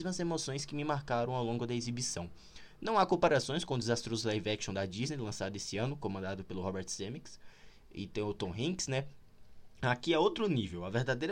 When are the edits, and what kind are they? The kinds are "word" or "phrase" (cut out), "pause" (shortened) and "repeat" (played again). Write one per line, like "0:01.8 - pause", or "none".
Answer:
none